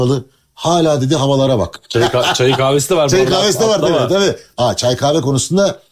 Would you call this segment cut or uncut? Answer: uncut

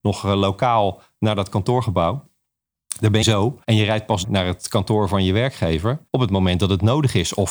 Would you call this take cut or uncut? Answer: cut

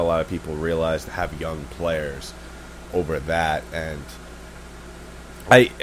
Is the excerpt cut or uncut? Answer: cut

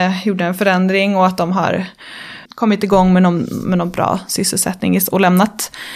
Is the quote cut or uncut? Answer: cut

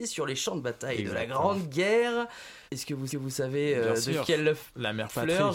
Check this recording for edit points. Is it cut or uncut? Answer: cut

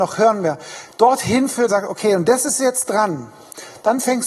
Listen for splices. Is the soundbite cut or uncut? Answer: cut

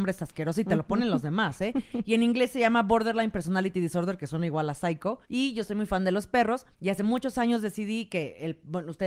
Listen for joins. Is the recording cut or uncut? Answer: cut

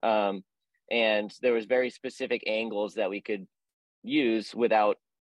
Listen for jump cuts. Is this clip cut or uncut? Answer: uncut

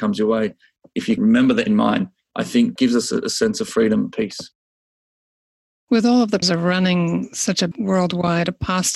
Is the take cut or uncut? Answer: cut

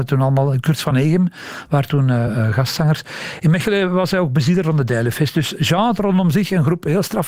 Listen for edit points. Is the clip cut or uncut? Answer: uncut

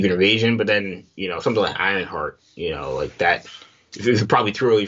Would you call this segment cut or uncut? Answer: uncut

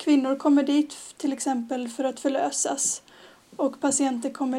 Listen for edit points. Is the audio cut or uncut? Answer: uncut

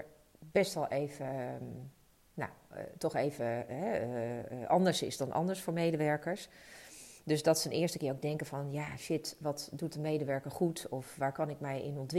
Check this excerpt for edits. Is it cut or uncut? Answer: uncut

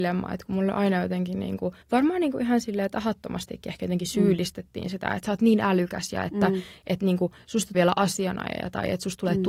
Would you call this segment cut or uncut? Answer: cut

